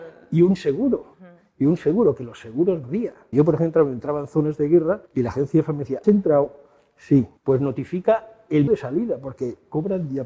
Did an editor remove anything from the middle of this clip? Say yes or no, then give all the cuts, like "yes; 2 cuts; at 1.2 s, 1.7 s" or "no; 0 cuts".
yes; 7 cuts; at 1.1 s, 2.8 s, 3.3 s, 5.1 s, 6.0 s, 7.4 s, 8.7 s